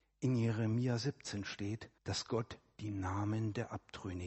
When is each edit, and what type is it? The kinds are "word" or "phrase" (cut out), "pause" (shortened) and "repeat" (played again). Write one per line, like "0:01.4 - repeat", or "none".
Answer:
0:02.0 - pause